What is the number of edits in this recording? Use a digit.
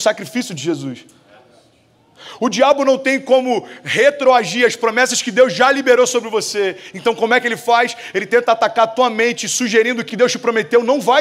1